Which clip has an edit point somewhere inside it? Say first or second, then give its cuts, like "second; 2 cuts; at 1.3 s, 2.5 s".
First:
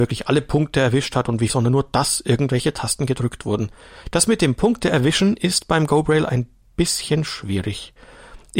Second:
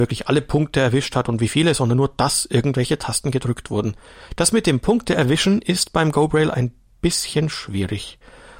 first; 1 cut; at 1.5 s